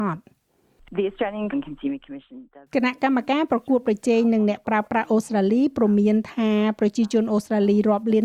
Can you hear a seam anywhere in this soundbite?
yes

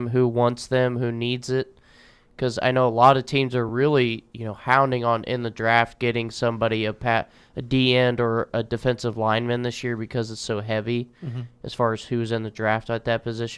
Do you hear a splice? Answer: no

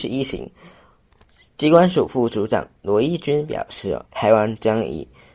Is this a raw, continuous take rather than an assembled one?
no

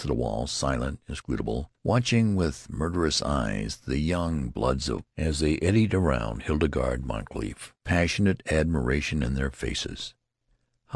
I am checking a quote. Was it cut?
yes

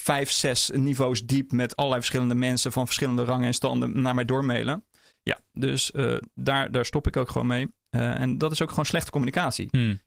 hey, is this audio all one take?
yes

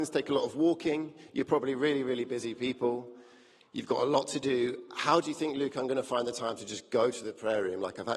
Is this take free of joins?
yes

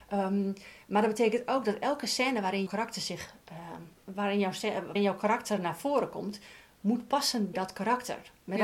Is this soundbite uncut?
no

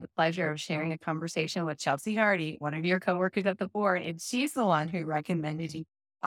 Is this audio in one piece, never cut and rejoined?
yes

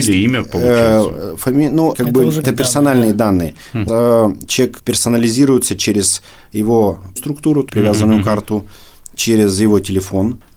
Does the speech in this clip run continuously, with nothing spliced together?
no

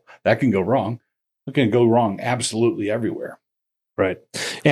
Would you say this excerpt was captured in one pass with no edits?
yes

